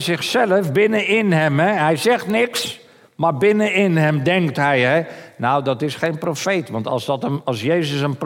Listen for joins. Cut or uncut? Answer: uncut